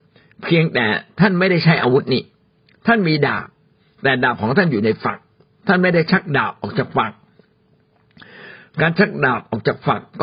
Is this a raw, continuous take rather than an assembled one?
yes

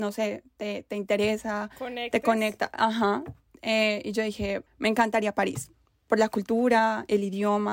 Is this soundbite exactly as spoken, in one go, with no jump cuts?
no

